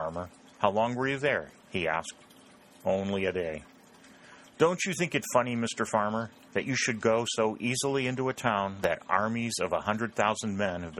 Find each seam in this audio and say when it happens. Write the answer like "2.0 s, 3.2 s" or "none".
none